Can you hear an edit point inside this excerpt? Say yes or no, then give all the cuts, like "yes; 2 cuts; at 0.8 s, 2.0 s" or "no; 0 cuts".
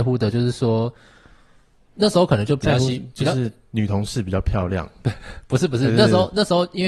no; 0 cuts